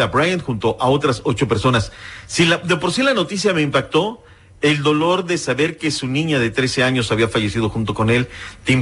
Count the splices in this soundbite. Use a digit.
0